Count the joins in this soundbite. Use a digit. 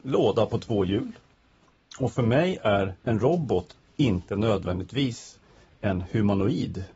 1